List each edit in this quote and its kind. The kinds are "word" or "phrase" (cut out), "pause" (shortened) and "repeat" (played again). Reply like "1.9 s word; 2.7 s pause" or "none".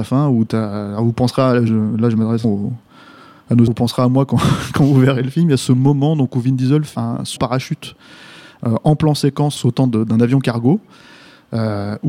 1.7 s word; 2.4 s word; 3.7 s word; 6.9 s word; 7.4 s word; 9.6 s phrase